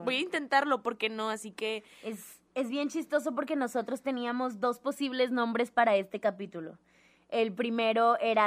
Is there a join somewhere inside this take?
no; 0 cuts

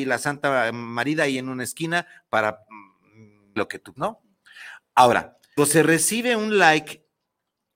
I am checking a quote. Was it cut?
yes; 3 cuts; at 3.6 s, 4.0 s, 5.6 s

